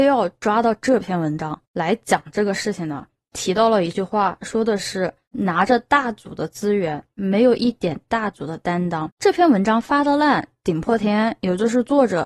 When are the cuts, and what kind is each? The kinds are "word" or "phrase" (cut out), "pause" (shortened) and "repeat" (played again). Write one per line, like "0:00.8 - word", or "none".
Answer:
none